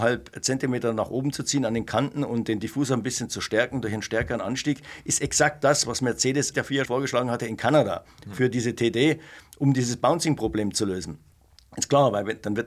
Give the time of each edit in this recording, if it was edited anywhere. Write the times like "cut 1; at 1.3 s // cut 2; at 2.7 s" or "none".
cut 1; at 6.5 s // cut 2; at 6.9 s